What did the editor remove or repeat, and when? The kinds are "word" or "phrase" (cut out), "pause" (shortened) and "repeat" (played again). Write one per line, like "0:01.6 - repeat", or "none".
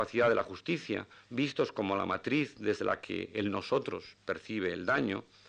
0:01.1 - pause